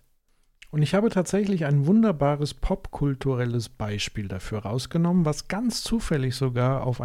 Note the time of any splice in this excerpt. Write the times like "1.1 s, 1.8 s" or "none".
none